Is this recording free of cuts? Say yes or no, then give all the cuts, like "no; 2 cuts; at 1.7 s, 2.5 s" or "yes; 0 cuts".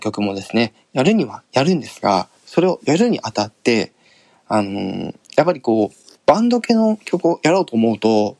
no; 3 cuts; at 2.4 s, 5.2 s, 6.2 s